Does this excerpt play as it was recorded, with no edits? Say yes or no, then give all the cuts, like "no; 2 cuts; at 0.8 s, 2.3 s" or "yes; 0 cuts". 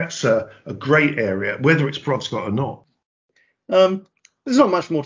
yes; 0 cuts